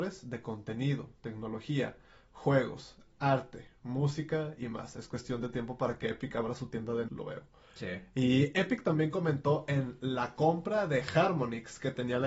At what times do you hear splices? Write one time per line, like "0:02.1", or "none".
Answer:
0:07.1